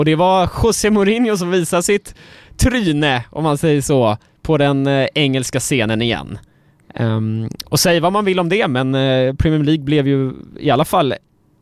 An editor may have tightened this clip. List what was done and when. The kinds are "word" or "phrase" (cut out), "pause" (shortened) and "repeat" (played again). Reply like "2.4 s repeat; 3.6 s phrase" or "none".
none